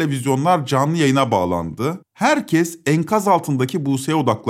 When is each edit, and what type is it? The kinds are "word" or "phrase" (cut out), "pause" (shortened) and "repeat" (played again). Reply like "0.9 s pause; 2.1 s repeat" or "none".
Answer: 2.0 s pause